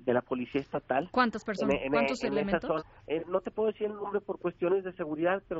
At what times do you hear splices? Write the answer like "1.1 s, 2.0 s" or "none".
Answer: 2.8 s